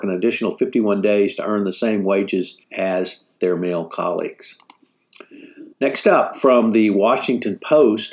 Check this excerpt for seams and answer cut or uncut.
cut